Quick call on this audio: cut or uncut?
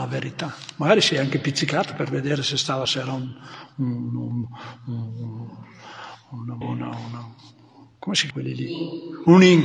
cut